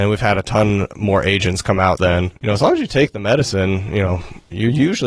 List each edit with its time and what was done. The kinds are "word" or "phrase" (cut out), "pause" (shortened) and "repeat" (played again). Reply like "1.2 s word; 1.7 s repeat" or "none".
2.0 s word